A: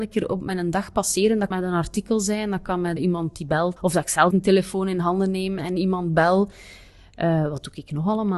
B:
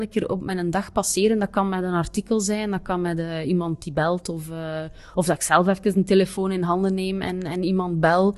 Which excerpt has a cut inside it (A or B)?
A